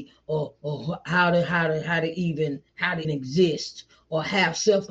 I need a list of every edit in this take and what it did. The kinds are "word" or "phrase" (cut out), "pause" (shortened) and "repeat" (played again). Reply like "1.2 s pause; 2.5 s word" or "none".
2.7 s pause; 3.0 s word